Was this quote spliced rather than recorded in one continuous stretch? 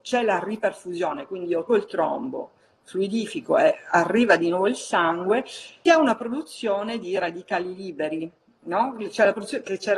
yes; 2 cuts; at 1.7 s, 5.9 s

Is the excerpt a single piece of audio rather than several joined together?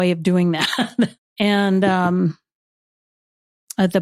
no; 1 cut; at 1.2 s

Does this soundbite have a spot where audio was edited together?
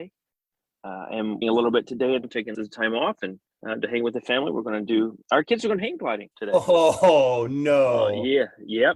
yes; 7 cuts; at 1.4 s, 2.2 s, 2.5 s, 3.5 s, 5.2 s, 5.8 s, 6.3 s

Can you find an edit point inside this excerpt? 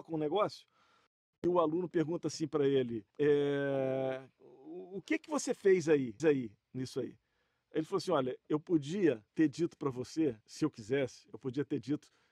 yes; 4 cuts; at 3.1 s, 6.2 s, 9.3 s, 10.4 s

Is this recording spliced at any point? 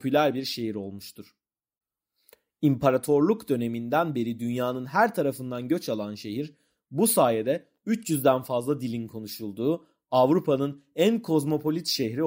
no; 0 cuts

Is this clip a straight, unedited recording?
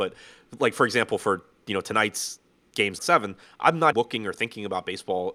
no; 2 cuts; at 3.0 s, 3.9 s

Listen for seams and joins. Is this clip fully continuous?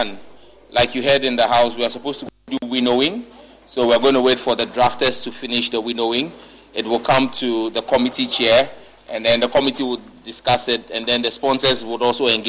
yes; 0 cuts

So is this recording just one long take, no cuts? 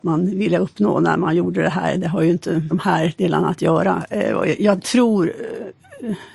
no; 2 cuts; at 2.7 s, 4.8 s

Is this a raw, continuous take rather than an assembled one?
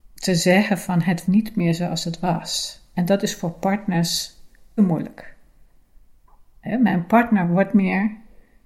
no; 3 cuts; at 1.3 s, 4.8 s, 7.7 s

